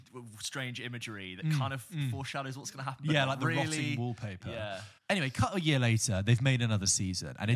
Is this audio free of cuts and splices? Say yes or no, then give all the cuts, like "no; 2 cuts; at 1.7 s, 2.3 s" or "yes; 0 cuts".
no; 1 cut; at 5.0 s